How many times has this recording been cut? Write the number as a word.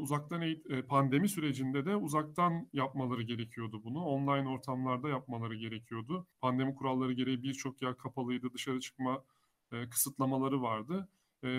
one